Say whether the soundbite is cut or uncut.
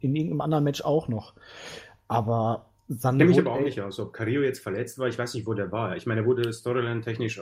uncut